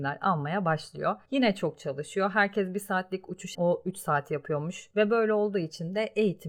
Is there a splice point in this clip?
yes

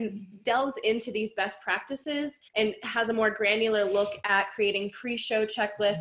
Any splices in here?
yes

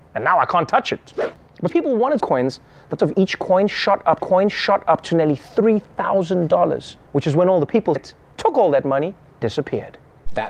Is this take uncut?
no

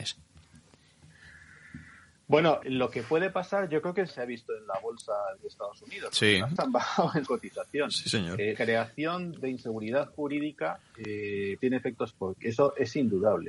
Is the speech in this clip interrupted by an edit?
yes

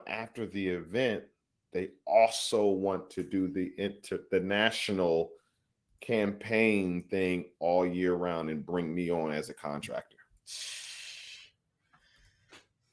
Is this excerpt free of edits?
yes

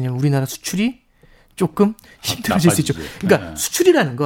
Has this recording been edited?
no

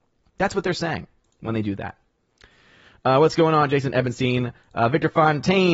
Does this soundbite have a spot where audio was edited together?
no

